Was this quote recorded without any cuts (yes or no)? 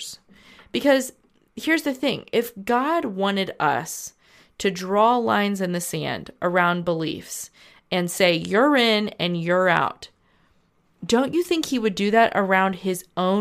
yes